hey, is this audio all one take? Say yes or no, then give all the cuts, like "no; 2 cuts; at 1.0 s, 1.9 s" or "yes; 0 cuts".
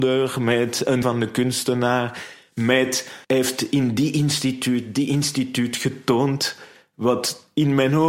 no; 2 cuts; at 1.0 s, 3.2 s